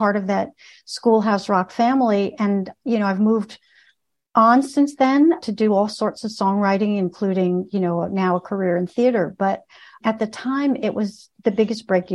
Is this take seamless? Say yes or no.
yes